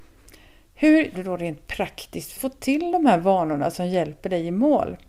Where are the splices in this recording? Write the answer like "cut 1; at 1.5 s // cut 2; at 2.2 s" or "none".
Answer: cut 1; at 1.1 s // cut 2; at 2.4 s